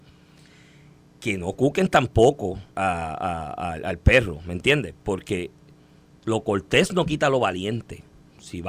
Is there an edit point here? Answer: yes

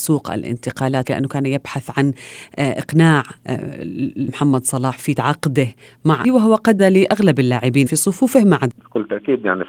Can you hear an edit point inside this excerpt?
yes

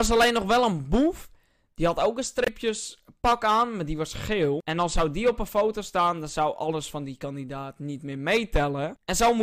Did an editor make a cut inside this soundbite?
no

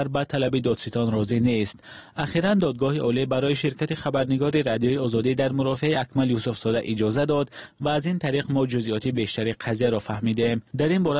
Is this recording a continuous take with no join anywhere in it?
yes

